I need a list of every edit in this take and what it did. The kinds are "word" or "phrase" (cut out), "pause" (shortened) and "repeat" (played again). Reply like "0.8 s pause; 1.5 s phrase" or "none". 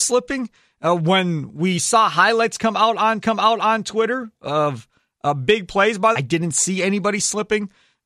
3.2 s repeat; 6.1 s phrase